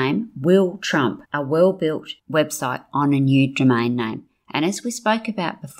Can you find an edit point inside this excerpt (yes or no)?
yes